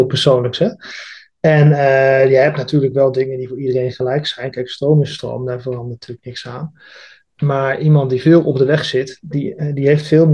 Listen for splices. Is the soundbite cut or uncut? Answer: uncut